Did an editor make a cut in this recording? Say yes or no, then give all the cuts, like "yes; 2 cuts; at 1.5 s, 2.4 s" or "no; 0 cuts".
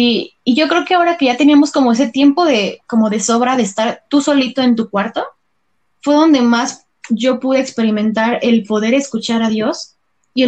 no; 0 cuts